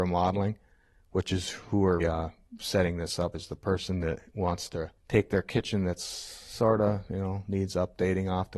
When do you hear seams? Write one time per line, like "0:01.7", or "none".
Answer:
0:02.0
0:03.3
0:05.0